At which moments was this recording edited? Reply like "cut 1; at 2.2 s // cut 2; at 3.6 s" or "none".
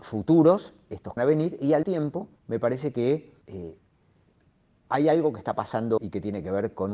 cut 1; at 1.2 s // cut 2; at 1.8 s // cut 3; at 2.4 s // cut 4; at 3.4 s // cut 5; at 6.0 s